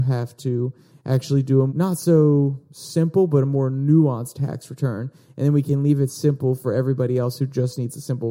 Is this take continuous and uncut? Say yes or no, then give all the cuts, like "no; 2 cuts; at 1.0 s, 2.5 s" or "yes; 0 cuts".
no; 1 cut; at 1.7 s